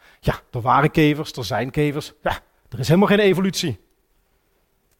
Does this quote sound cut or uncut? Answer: uncut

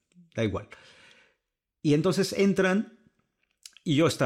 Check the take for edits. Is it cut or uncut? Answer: uncut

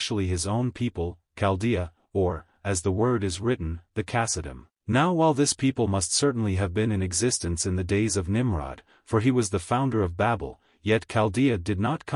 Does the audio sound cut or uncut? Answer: cut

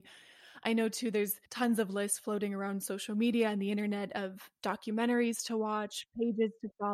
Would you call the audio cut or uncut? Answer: cut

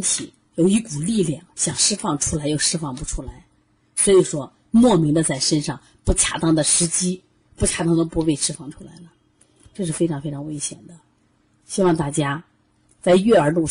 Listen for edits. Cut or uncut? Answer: uncut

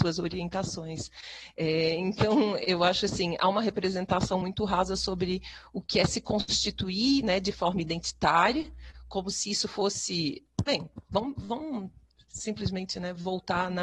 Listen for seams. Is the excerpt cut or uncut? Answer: uncut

